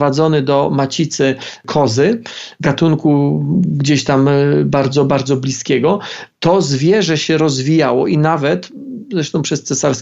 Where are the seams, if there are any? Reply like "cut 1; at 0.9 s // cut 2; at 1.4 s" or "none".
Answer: none